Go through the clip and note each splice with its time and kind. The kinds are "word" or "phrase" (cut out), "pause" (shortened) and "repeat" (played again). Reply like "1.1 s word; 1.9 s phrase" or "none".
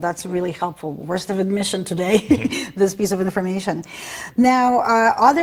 1.3 s word